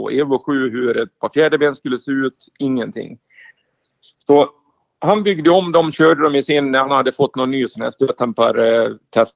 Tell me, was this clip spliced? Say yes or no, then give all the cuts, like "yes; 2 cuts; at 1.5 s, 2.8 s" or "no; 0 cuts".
no; 0 cuts